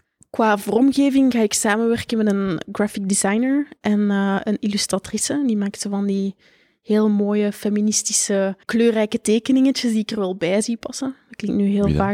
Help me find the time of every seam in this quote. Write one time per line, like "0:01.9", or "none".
0:08.6